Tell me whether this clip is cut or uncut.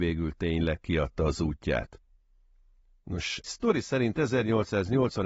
cut